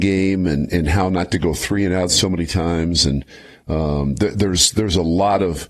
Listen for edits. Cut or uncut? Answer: uncut